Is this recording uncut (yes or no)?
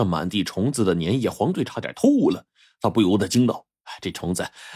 yes